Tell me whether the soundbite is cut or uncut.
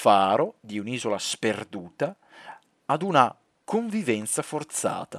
uncut